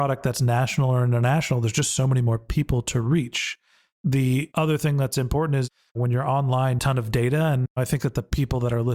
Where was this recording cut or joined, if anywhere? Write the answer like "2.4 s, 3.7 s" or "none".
6.8 s